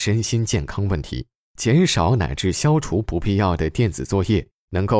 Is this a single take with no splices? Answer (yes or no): yes